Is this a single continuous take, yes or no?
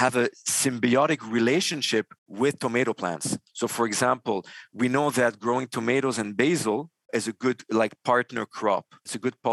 no